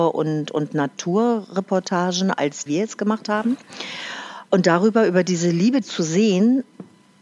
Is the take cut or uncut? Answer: cut